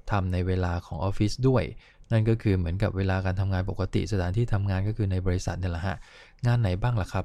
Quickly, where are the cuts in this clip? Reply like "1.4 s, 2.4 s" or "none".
none